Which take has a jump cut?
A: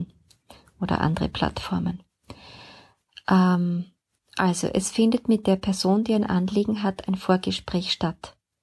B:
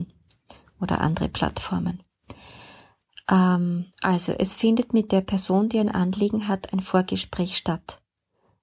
B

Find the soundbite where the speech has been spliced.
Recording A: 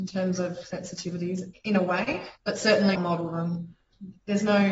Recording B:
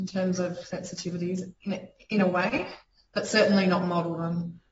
A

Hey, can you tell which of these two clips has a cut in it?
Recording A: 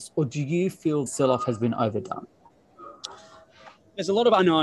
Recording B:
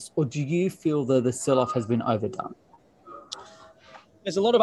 A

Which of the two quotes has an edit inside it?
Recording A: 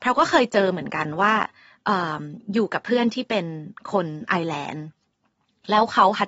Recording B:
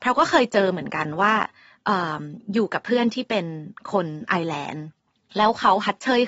B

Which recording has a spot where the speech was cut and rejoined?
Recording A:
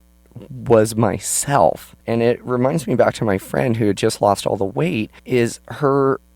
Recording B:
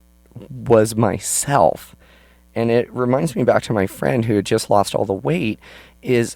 A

